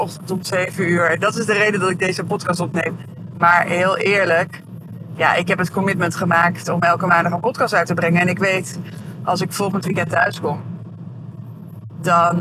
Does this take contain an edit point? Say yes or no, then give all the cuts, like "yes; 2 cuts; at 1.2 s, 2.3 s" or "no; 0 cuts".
no; 0 cuts